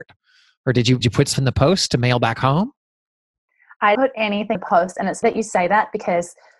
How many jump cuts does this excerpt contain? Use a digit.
5